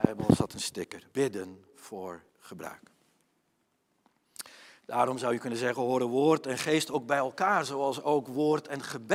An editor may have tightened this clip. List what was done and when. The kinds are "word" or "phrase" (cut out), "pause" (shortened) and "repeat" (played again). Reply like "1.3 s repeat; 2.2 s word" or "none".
1.1 s pause; 2.3 s pause